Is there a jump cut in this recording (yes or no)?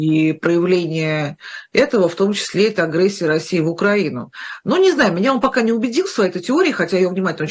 no